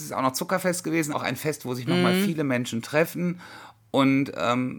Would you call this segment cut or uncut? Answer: cut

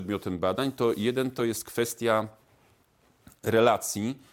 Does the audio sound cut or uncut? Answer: uncut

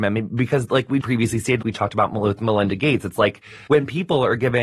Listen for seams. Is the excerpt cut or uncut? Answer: cut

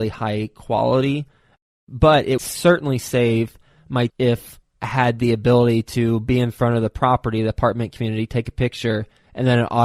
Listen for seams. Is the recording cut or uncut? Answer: cut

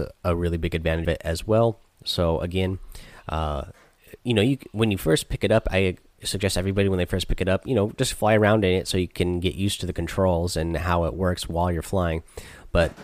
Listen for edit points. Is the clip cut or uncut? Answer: cut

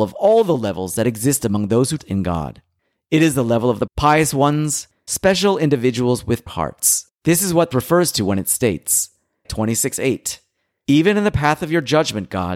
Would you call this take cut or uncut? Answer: cut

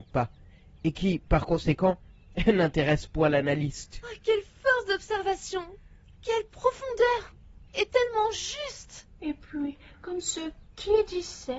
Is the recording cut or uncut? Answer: uncut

